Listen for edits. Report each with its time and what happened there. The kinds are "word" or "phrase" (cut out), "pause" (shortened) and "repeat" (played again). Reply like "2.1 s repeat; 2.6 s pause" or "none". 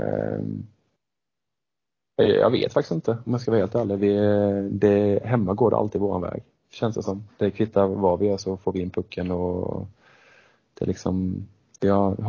none